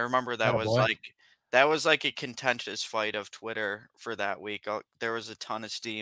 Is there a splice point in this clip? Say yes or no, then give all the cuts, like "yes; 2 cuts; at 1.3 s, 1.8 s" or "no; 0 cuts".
no; 0 cuts